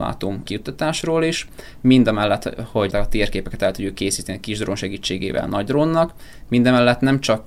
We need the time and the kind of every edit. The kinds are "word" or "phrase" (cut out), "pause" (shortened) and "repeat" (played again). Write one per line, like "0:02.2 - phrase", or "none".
0:02.9 - word